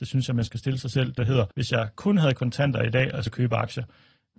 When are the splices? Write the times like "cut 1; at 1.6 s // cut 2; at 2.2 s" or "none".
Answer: cut 1; at 1.2 s // cut 2; at 1.5 s // cut 3; at 3.3 s